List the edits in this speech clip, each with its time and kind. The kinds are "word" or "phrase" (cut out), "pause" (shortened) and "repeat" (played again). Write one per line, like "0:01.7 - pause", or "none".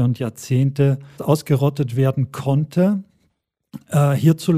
0:01.1 - word